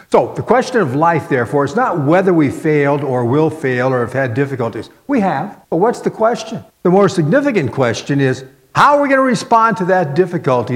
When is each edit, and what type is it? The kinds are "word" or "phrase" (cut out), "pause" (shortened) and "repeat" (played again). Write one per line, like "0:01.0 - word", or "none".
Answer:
0:05.6 - pause
0:06.7 - pause